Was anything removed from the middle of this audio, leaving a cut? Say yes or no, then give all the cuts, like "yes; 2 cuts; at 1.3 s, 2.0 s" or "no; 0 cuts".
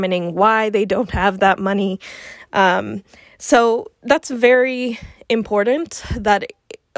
no; 0 cuts